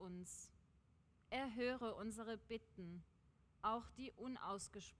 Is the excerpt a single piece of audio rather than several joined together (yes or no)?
yes